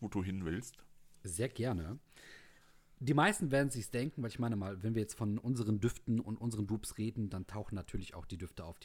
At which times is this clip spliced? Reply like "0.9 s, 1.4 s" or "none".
none